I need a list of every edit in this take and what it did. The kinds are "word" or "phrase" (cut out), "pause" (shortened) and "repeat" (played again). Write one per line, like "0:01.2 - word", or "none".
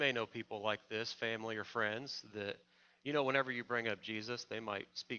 none